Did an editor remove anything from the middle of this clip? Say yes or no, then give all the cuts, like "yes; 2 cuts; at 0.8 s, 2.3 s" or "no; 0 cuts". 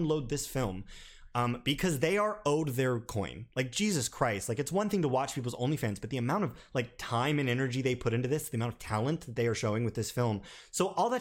yes; 1 cut; at 3.5 s